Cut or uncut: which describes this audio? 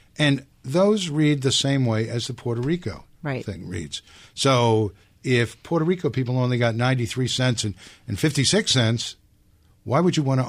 uncut